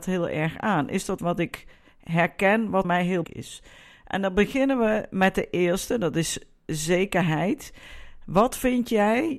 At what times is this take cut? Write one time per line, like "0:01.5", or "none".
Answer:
0:01.2
0:02.8
0:03.2